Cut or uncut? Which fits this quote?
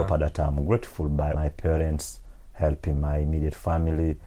cut